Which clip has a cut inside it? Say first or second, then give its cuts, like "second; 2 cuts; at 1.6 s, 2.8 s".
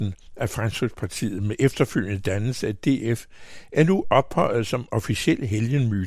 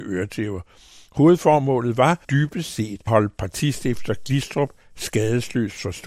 second; 2 cuts; at 2.2 s, 3.1 s